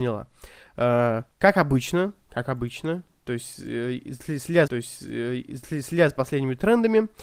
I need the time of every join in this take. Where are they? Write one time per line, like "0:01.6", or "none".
0:01.3
0:04.7